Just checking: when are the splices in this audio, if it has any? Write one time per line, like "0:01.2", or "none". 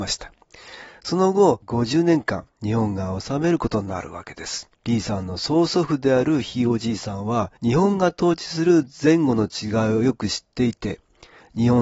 0:02.5
0:04.7
0:07.6